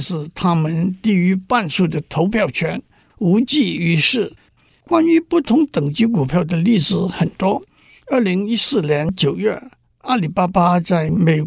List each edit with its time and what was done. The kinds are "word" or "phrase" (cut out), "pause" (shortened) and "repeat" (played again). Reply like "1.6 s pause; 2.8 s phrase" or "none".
none